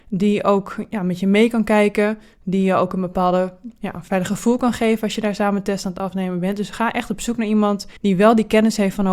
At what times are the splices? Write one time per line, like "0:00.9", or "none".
0:08.0

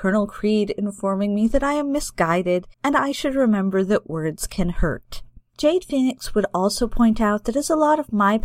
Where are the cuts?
0:02.7
0:05.5

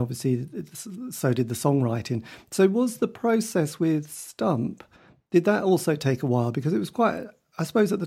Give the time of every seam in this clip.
none

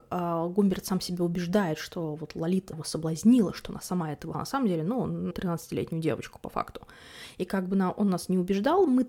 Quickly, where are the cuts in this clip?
0:02.7
0:04.3
0:05.3

